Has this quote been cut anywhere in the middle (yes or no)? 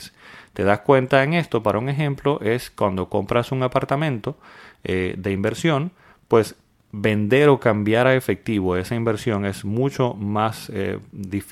no